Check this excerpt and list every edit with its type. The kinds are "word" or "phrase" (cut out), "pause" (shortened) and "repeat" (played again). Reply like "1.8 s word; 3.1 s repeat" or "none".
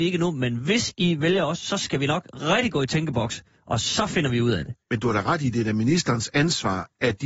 4.8 s pause